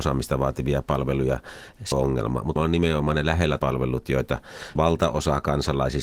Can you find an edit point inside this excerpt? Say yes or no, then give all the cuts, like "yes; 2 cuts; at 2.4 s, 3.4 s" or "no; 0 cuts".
yes; 4 cuts; at 1.9 s, 2.6 s, 3.6 s, 4.7 s